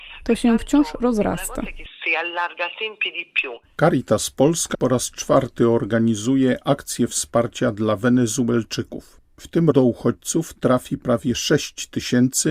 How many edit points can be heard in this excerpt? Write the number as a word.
two